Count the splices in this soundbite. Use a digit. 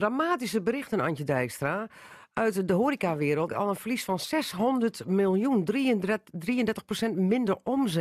1